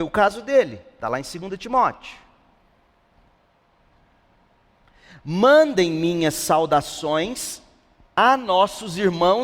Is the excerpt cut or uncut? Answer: uncut